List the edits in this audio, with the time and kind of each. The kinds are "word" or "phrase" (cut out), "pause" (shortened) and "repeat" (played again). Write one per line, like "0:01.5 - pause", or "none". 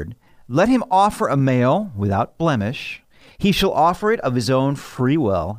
none